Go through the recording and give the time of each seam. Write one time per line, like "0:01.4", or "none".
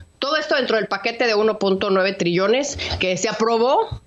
none